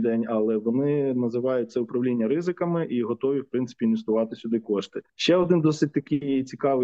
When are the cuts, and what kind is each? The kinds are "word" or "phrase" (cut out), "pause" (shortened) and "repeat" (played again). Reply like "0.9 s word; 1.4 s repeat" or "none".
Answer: 5.1 s pause

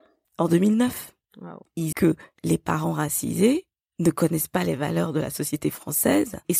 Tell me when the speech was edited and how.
1.9 s word

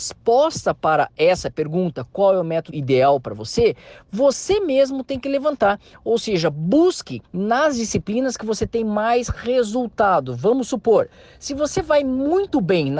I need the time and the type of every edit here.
2.7 s phrase; 7.2 s pause

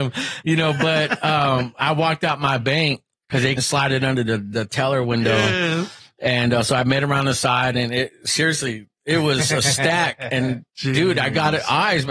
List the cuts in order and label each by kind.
3.6 s word; 10.7 s pause

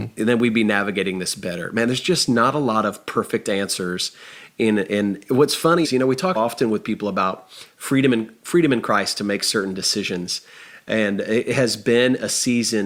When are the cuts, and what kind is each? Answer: 5.8 s word; 6.4 s word

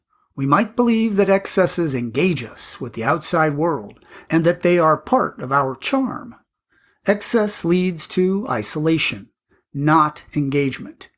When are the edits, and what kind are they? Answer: none

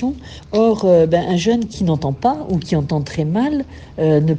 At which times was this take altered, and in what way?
none

